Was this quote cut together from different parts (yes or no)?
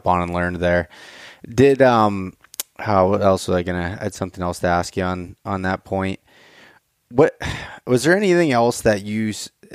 no